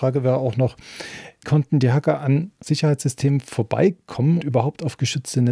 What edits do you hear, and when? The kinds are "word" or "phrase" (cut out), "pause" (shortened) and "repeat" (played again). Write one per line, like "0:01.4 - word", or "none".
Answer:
0:01.4 - word
0:02.6 - word
0:04.4 - word